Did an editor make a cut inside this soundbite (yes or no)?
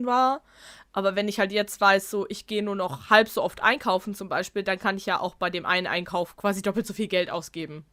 no